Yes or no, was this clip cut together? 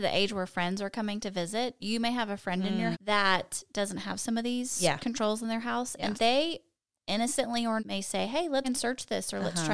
yes